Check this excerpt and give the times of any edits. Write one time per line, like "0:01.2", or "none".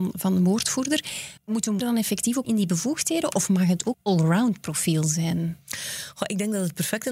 0:01.4
0:01.8
0:02.4
0:03.9